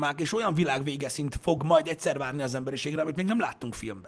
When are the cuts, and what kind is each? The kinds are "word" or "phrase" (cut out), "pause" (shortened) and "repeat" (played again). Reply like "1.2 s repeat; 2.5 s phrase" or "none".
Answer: none

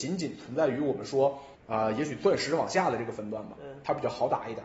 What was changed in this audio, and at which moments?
1.6 s pause

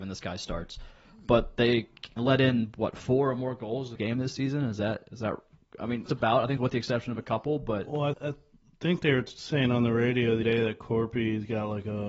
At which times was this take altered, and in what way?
2.2 s word; 4.0 s word; 6.1 s word; 6.6 s word; 8.1 s word; 10.4 s word

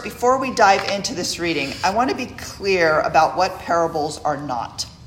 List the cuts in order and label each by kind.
none

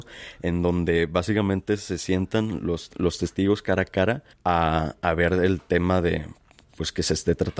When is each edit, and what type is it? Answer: 4.3 s pause

